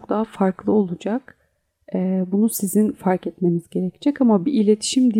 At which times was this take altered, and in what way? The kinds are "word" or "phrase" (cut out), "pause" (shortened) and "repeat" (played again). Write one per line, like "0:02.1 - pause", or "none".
none